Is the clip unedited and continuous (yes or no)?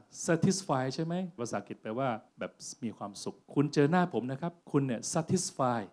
no